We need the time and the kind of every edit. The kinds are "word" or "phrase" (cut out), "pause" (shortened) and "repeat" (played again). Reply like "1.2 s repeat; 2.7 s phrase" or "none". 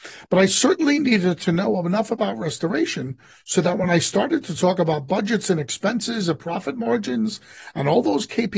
none